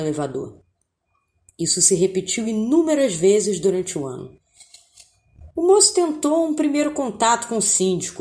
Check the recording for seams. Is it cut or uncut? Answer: uncut